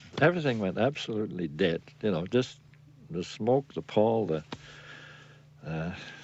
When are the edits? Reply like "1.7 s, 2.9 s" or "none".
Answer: none